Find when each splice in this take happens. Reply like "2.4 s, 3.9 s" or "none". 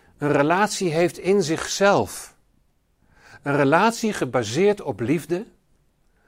none